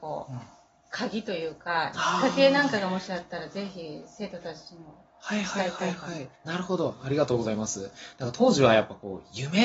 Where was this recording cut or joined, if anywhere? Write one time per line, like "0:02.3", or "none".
0:06.3